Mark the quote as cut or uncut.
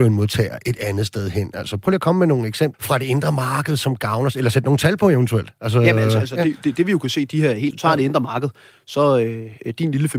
cut